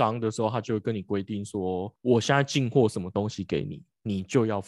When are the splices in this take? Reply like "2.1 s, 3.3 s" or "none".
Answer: 2.0 s